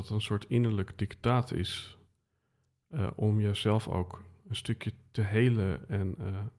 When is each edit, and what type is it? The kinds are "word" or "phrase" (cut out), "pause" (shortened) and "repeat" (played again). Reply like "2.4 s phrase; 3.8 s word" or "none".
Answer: none